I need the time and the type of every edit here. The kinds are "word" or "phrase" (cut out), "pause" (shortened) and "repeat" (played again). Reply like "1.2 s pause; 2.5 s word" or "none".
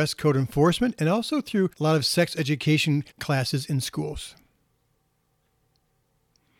1.7 s pause; 3.1 s pause